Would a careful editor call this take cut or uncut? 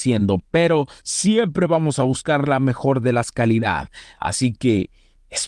uncut